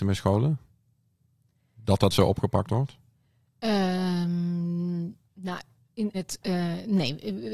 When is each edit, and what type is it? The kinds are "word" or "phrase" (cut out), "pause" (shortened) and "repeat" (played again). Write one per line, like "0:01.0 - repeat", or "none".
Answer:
0:06.1 - word